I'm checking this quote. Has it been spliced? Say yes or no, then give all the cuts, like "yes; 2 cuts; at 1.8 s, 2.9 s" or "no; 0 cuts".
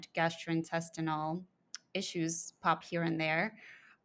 yes; 1 cut; at 2.8 s